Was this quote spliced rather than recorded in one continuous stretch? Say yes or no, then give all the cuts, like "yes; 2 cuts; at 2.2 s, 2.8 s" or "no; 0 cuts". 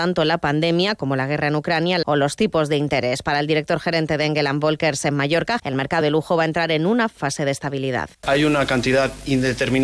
yes; 5 cuts; at 2.0 s, 5.6 s, 6.0 s, 7.2 s, 8.1 s